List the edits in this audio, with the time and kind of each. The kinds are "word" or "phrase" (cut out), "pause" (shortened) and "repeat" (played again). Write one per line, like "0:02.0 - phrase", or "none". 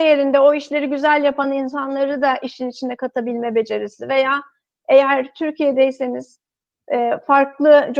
none